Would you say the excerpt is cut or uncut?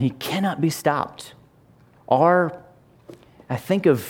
cut